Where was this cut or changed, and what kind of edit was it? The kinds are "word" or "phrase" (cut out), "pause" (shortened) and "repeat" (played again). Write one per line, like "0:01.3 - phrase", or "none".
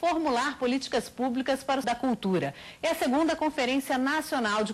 0:01.8 - word